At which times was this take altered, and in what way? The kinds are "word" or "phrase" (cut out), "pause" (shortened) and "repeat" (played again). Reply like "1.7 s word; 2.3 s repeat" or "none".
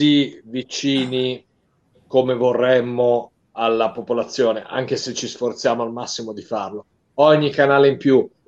none